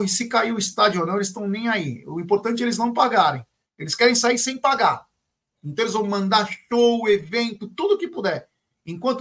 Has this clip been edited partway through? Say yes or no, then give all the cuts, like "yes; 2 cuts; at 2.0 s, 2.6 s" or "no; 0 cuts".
no; 0 cuts